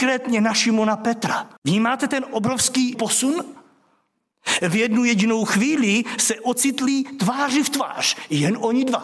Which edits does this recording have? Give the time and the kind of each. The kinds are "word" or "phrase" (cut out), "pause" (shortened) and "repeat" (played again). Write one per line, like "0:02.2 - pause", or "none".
0:01.6 - pause
0:02.9 - word